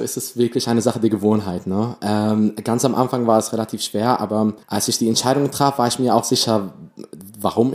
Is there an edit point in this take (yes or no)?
yes